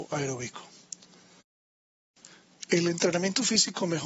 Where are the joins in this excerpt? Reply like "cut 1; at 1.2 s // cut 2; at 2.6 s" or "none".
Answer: none